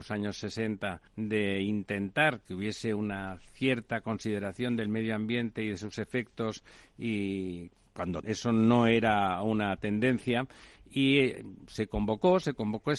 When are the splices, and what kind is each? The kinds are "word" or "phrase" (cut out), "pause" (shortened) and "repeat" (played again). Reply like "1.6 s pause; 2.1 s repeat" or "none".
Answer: 1.1 s pause; 8.2 s word